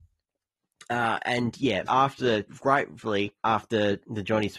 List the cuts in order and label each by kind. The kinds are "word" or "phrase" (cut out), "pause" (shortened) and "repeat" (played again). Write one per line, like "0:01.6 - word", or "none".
0:01.9 - word
0:02.5 - word
0:03.4 - pause